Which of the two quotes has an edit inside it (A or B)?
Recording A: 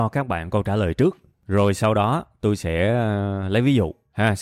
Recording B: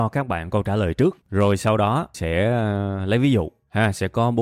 B